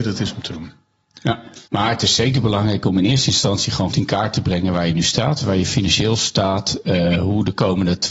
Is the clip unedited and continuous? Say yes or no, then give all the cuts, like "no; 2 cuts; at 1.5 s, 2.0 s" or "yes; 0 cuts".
no; 2 cuts; at 1.7 s, 3.9 s